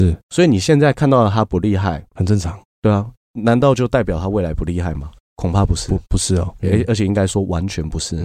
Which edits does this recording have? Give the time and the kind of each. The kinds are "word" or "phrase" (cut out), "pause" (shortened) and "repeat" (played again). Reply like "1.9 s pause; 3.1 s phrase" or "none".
3.2 s pause; 6.6 s word